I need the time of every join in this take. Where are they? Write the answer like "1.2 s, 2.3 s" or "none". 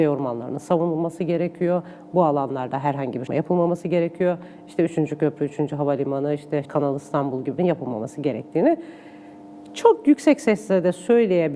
3.3 s, 6.6 s, 7.6 s